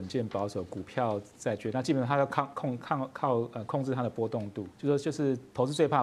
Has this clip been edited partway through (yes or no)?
yes